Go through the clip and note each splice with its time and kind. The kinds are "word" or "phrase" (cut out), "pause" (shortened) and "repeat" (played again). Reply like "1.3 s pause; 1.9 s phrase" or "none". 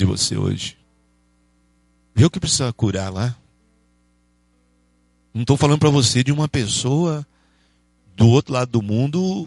none